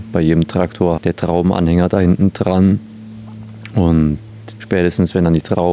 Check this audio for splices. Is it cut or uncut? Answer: cut